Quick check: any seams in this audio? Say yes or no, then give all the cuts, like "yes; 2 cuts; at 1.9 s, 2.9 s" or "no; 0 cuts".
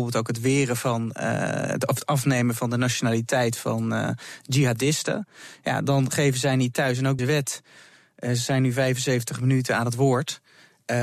yes; 1 cut; at 7.2 s